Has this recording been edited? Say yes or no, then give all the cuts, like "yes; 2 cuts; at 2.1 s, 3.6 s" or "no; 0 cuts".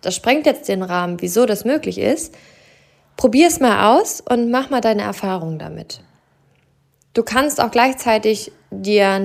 no; 0 cuts